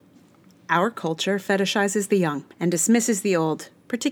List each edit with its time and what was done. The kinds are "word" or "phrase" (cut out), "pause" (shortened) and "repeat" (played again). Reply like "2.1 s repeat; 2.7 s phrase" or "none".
2.5 s pause